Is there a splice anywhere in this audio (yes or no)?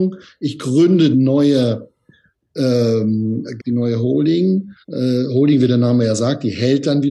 yes